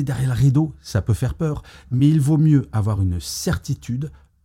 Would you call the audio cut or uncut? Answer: uncut